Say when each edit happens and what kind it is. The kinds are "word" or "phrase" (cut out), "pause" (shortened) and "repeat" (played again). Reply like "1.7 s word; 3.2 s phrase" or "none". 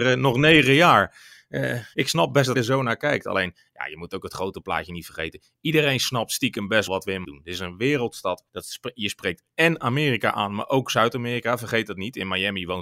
1.9 s word; 2.5 s word; 6.9 s word; 7.2 s word; 8.5 s pause

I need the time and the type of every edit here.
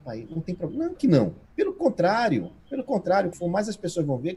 1.0 s word; 1.4 s pause; 2.6 s pause; 3.3 s phrase

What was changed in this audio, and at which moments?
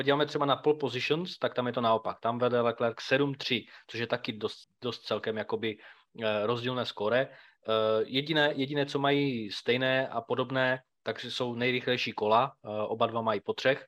4.6 s pause

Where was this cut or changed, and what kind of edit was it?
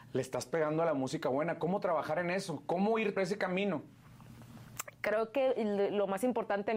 3.2 s word

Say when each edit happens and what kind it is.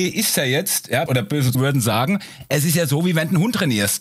1.1 s word; 1.5 s word

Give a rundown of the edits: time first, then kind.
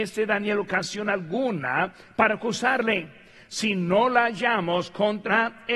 none

